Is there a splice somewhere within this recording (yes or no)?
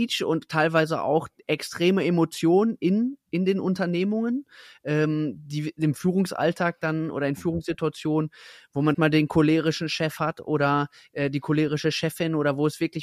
yes